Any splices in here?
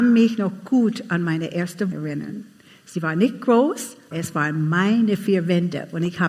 yes; 2 cuts; at 1.9 s, 4.1 s

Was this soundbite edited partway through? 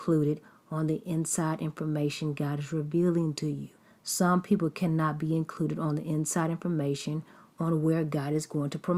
yes; 1 cut; at 3.7 s

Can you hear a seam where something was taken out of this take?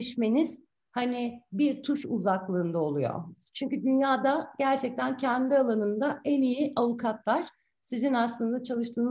no; 0 cuts

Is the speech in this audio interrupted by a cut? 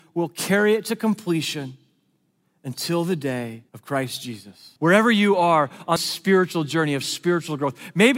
yes; 3 cuts; at 3.7 s, 4.8 s, 6.0 s

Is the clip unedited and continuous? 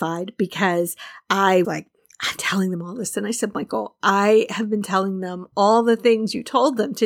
no; 2 cuts; at 1.6 s, 2.4 s

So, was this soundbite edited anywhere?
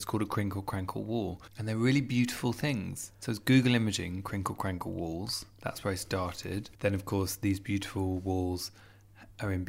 yes; 3 cuts; at 1.5 s, 3.1 s, 6.7 s

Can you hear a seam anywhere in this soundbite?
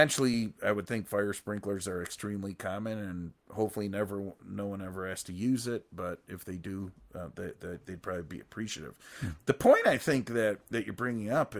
yes; 1 cut; at 4.4 s

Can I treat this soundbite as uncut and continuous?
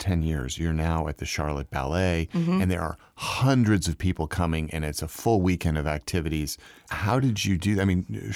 yes; 0 cuts

